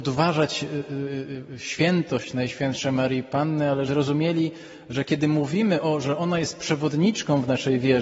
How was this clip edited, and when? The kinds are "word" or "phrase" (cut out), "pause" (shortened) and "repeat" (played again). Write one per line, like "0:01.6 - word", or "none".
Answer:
0:03.9 - word